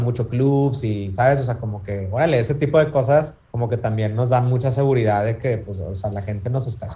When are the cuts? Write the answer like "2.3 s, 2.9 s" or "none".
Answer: 3.4 s